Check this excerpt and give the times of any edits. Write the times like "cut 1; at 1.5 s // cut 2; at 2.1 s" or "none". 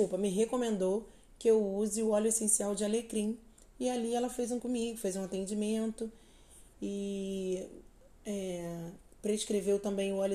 cut 1; at 4.6 s